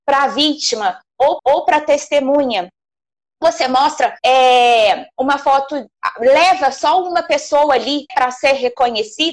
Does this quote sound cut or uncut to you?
cut